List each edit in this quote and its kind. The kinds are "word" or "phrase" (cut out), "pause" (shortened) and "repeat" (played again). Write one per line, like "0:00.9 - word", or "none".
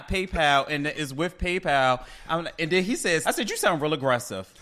0:00.9 - word
0:03.2 - word